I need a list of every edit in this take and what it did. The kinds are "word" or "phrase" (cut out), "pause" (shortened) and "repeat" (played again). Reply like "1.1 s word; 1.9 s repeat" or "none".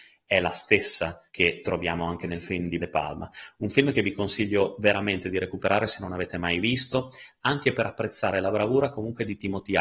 1.3 s pause; 2.8 s word